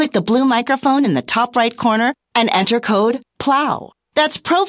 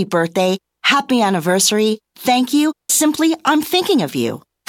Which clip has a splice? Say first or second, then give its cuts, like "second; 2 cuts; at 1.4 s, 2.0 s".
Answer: second; 1 cut; at 2.9 s